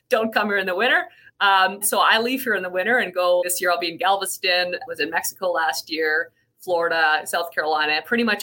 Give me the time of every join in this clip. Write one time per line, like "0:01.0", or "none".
0:01.8
0:03.4
0:04.9